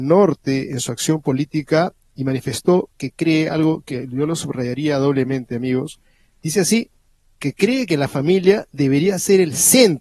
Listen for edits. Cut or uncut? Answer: uncut